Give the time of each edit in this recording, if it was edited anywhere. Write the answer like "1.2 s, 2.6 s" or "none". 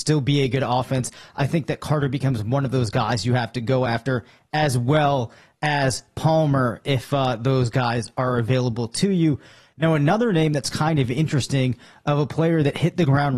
none